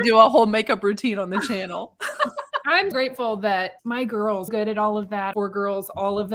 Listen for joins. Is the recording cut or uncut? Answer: cut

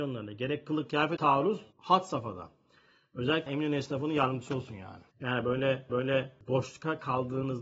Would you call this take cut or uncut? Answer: cut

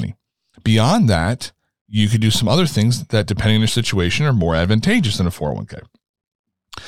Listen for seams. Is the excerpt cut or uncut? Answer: uncut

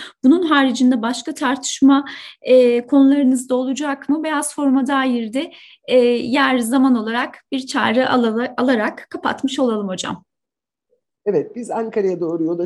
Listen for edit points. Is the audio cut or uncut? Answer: uncut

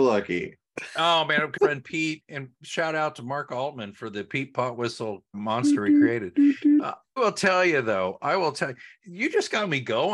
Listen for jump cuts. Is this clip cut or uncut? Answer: cut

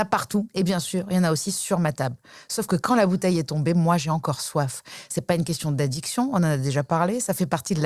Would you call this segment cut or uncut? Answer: uncut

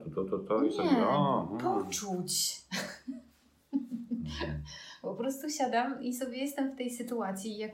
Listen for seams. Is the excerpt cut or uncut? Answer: uncut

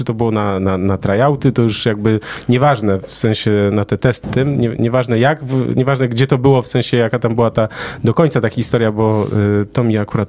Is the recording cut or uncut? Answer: cut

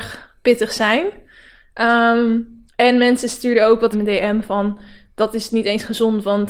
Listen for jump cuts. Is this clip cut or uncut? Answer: cut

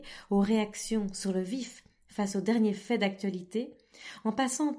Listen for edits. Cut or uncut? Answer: uncut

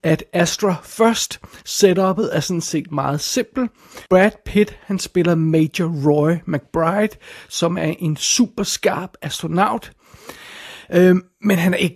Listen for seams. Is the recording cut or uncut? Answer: cut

